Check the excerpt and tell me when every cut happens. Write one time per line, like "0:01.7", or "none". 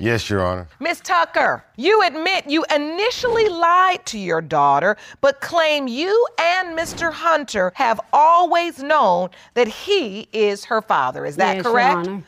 none